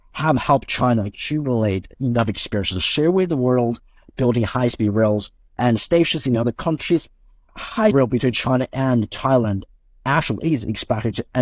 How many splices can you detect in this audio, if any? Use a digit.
1